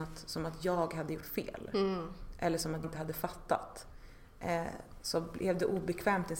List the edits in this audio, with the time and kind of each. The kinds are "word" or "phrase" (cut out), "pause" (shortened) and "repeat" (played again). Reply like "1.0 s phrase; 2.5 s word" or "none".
1.2 s word; 2.8 s word